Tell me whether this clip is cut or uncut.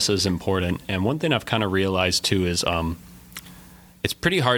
uncut